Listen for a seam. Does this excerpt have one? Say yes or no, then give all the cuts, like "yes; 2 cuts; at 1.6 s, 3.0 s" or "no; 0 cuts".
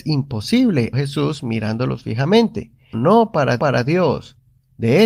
yes; 3 cuts; at 0.9 s, 2.9 s, 3.6 s